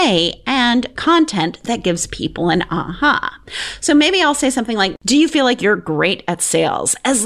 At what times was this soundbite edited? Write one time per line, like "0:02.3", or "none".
0:01.0

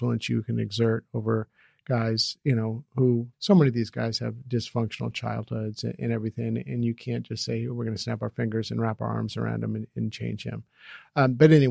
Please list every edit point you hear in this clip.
0:03.3

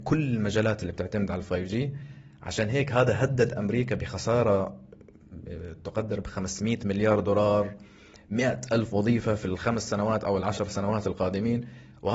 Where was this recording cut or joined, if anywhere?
none

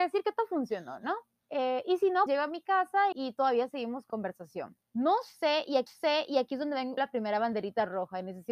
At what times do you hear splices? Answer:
0:01.4
0:02.3
0:03.1
0:04.1
0:04.8
0:05.9
0:07.0

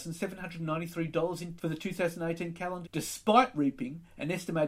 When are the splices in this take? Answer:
0:01.6
0:02.8

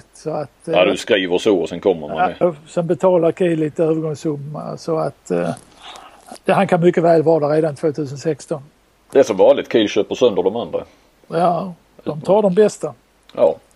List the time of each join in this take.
0:02.4

